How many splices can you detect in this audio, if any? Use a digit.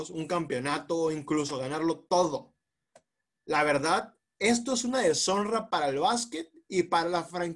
0